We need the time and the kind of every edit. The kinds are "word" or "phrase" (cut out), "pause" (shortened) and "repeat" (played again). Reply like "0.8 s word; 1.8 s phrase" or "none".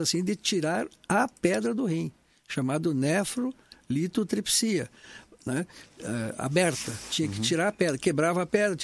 none

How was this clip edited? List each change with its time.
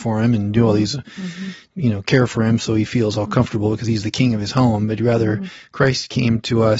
none

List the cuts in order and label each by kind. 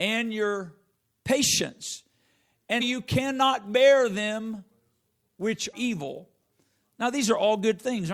2.8 s word; 5.7 s word

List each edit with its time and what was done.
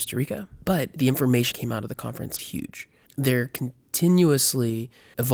1.5 s word; 2.4 s word

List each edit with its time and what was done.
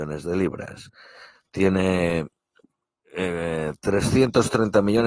none

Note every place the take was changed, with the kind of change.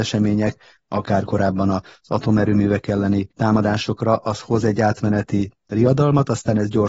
1.3 s word; 3.3 s pause

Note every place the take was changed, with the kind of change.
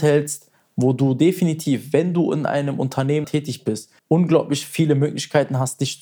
3.2 s word; 4.0 s pause

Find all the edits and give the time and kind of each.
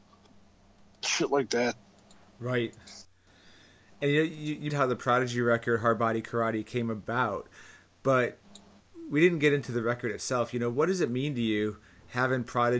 4.7 s word

